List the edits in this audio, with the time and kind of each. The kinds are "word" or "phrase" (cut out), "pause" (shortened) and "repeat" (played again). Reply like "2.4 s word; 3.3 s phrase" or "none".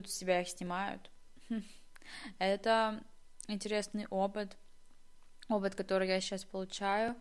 none